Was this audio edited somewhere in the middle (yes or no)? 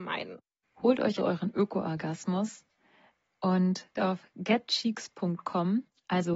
yes